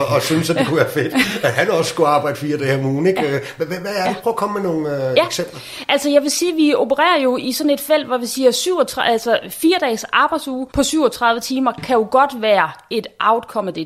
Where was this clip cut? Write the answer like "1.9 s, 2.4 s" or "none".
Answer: 10.7 s